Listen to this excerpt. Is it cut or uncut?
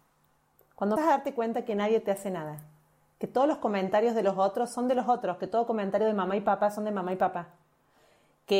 cut